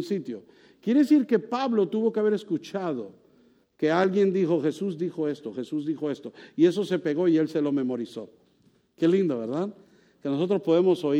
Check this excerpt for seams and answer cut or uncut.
uncut